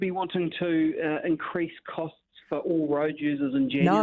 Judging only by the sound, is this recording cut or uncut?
uncut